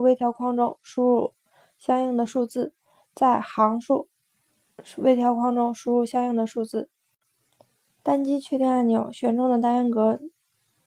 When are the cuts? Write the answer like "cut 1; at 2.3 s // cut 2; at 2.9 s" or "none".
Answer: none